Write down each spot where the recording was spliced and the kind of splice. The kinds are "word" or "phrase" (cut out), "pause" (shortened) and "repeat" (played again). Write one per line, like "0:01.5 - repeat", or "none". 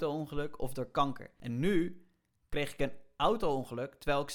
none